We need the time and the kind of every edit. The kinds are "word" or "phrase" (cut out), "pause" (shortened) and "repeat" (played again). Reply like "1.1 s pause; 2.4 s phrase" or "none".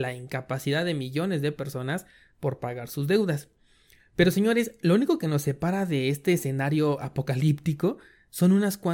none